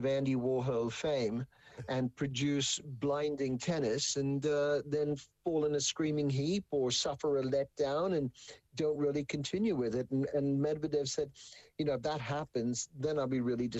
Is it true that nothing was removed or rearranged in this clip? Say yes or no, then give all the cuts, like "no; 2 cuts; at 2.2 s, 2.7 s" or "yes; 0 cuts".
yes; 0 cuts